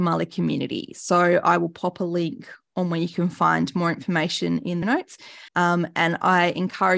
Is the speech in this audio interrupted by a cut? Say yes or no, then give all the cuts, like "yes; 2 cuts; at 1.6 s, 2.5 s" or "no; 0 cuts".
yes; 2 cuts; at 4.8 s, 5.5 s